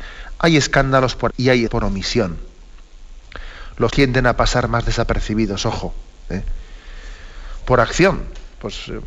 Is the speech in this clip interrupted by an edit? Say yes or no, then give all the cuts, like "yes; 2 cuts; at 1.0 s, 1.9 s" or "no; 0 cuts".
yes; 3 cuts; at 1.3 s, 1.7 s, 3.9 s